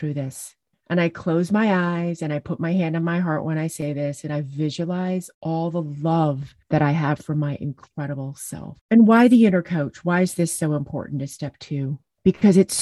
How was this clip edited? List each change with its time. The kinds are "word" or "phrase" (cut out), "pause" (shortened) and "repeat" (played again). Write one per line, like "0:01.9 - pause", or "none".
0:05.3 - pause
0:08.8 - pause